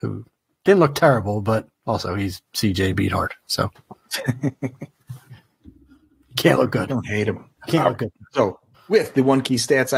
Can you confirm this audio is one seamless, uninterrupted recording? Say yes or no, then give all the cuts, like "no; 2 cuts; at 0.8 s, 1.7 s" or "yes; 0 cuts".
no; 3 cuts; at 2.5 s, 7.6 s, 8.7 s